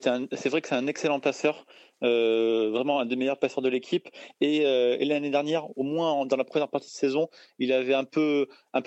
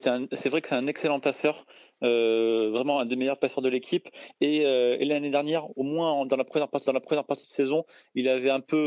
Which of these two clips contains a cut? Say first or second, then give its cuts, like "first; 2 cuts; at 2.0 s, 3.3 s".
second; 1 cut; at 6.9 s